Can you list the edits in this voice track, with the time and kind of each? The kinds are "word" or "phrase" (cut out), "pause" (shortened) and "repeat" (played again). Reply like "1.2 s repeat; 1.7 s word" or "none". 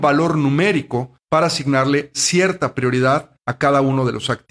1.2 s pause; 3.4 s pause